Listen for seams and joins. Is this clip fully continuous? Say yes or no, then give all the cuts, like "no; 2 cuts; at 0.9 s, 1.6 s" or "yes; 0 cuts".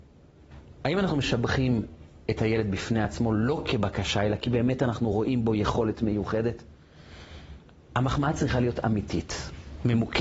yes; 0 cuts